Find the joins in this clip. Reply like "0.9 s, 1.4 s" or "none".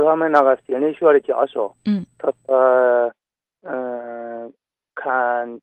1.8 s